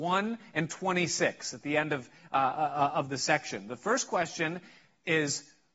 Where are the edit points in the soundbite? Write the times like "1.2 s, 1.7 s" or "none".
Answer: none

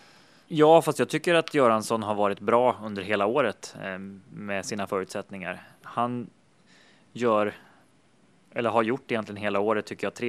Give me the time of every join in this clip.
none

